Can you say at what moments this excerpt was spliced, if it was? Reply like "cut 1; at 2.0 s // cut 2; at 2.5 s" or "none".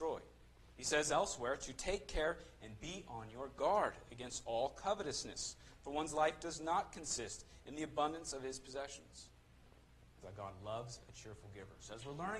cut 1; at 10.2 s